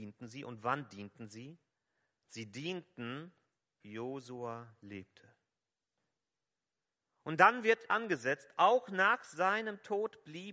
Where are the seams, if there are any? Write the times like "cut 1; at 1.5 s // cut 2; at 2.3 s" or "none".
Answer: cut 1; at 3.8 s // cut 2; at 7.9 s